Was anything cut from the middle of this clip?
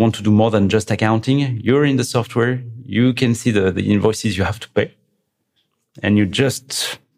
no; 0 cuts

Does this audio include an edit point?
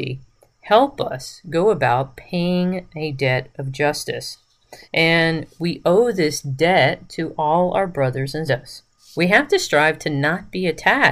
yes; 3 cuts; at 4.8 s, 8.5 s, 9.0 s

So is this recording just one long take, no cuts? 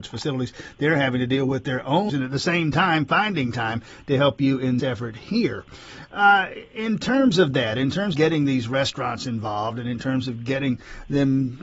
no; 3 cuts; at 2.1 s, 4.8 s, 8.1 s

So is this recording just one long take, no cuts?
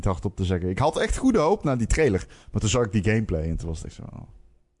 yes; 0 cuts

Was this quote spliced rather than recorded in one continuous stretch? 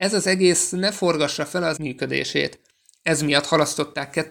yes; 1 cut; at 1.8 s

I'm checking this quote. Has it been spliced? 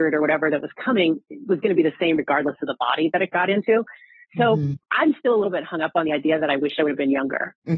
no; 0 cuts

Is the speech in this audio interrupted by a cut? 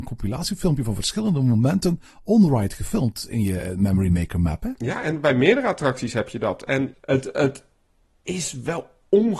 no; 0 cuts

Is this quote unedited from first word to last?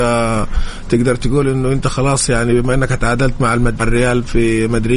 no; 1 cut; at 3.8 s

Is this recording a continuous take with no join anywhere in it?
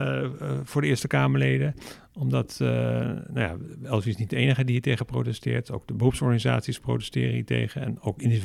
yes; 0 cuts

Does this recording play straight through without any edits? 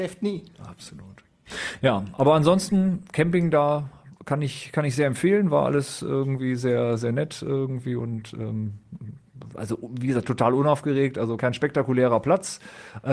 no; 1 cut; at 11.4 s

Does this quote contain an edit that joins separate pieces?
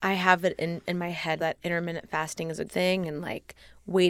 yes; 2 cuts; at 1.4 s, 2.7 s

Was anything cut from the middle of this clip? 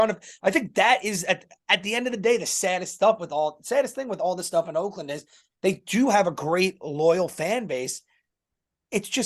no; 0 cuts

